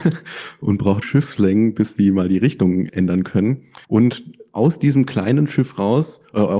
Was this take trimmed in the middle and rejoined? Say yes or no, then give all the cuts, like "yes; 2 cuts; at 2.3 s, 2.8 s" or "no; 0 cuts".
yes; 3 cuts; at 1.0 s, 2.9 s, 3.8 s